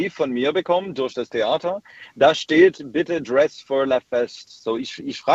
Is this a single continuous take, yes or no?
yes